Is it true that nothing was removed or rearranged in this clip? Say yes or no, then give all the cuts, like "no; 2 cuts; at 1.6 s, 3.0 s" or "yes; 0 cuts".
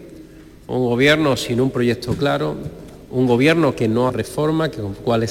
no; 1 cut; at 4.1 s